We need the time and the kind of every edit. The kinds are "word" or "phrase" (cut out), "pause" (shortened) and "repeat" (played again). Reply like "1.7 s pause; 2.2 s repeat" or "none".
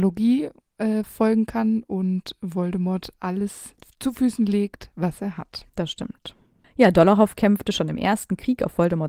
5.7 s pause

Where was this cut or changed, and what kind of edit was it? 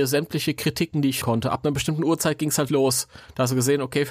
1.2 s word; 2.7 s word

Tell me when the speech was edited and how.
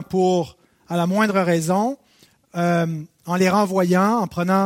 none

